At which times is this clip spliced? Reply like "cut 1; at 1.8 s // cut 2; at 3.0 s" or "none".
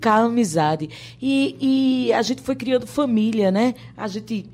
none